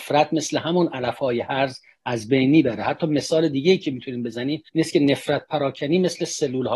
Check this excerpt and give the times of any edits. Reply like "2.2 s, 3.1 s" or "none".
4.7 s